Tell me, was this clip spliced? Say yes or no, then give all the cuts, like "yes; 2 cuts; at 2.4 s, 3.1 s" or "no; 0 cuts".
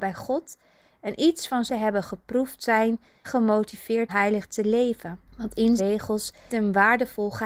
yes; 6 cuts; at 1.7 s, 3.2 s, 4.1 s, 5.3 s, 5.8 s, 6.5 s